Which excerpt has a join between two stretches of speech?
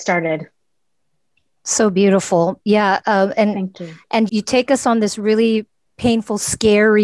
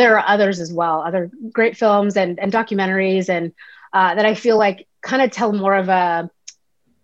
first; 2 cuts; at 4.3 s, 5.9 s

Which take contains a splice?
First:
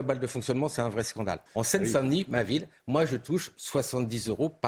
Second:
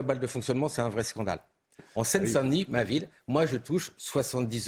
first; 1 cut; at 1.5 s

